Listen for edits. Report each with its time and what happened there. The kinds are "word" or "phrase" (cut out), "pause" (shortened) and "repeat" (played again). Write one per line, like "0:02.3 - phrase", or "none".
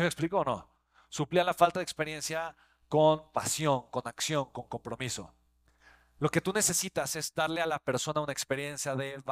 none